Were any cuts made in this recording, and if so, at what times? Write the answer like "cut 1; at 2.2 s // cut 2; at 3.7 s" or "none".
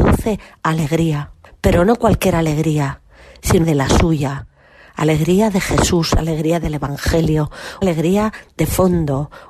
cut 1; at 1.5 s // cut 2; at 3.6 s // cut 3; at 7.8 s